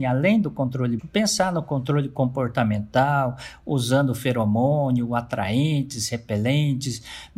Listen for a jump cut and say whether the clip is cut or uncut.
cut